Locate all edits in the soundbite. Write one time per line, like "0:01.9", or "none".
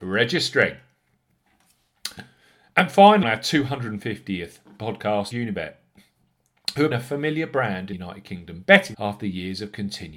0:03.2
0:05.3
0:06.9
0:07.9
0:08.9